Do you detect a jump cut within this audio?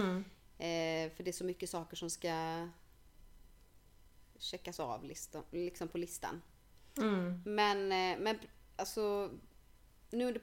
no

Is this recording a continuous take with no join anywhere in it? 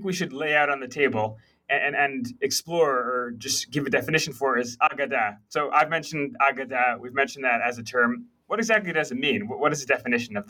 yes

